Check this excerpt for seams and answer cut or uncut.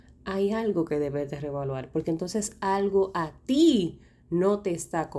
uncut